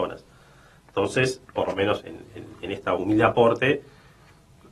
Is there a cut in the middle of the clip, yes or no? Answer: yes